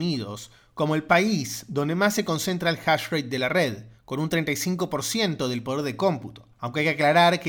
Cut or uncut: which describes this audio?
cut